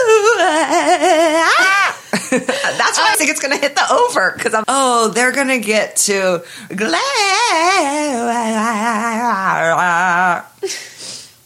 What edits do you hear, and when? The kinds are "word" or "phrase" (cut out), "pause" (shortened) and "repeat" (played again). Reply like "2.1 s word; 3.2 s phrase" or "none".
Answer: 3.1 s word; 4.6 s word; 6.7 s word